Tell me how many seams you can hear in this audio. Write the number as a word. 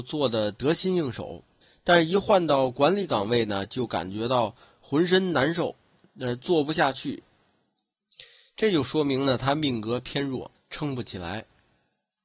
one